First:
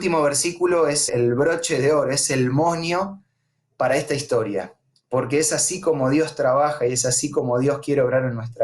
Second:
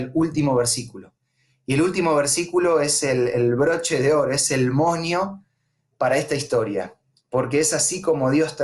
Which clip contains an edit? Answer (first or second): first